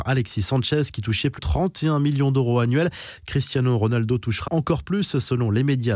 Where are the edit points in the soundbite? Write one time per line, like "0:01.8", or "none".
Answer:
0:01.4
0:04.5